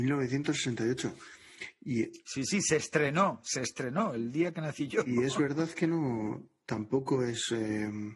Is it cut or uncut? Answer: uncut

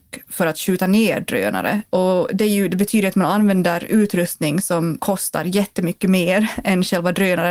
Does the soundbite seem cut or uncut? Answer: uncut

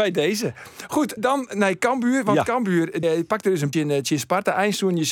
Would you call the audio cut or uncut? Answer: cut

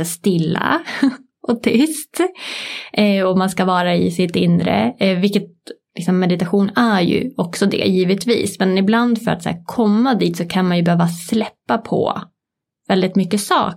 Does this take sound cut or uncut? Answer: uncut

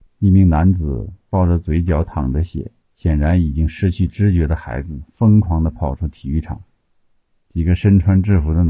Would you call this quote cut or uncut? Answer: uncut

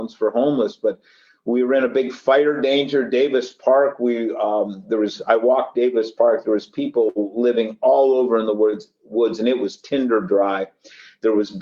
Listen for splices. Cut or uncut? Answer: uncut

